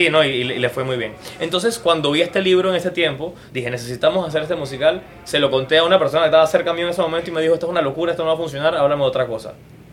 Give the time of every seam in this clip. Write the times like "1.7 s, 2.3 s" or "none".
3.5 s